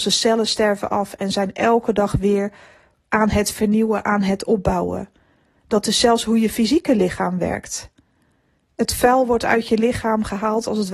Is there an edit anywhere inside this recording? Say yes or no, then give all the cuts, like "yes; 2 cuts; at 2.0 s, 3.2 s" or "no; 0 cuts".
no; 0 cuts